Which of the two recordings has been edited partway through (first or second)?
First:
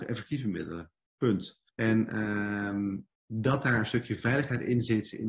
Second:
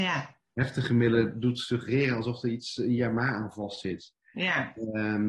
first